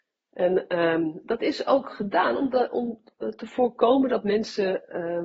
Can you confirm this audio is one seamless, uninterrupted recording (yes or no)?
yes